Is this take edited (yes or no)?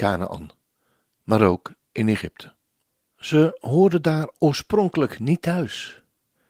no